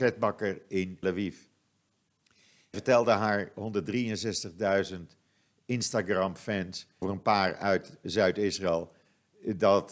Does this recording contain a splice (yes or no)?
yes